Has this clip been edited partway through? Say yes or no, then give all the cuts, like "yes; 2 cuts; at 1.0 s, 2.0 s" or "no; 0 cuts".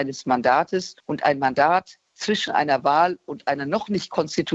yes; 1 cut; at 1.0 s